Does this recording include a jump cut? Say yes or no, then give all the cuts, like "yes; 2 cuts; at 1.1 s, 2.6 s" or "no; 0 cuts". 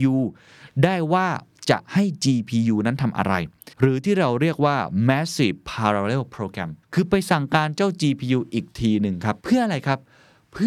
yes; 3 cuts; at 3.7 s, 6.8 s, 9.4 s